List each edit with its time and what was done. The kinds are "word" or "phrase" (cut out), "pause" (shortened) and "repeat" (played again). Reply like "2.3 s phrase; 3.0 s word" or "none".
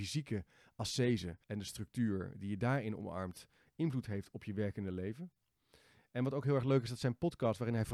1.4 s pause